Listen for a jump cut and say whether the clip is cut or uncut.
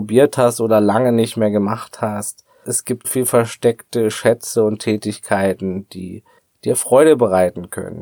cut